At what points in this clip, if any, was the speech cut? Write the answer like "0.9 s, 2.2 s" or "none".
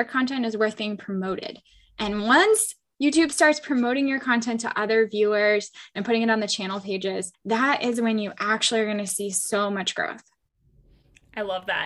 7.3 s